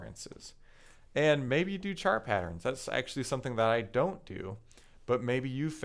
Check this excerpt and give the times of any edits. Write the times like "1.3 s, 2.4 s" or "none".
none